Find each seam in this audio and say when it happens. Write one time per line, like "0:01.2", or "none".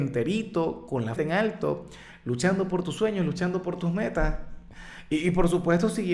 0:01.2